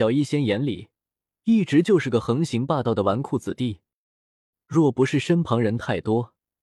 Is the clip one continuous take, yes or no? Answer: yes